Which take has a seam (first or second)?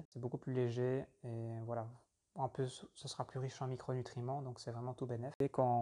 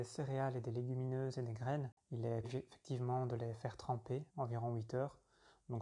second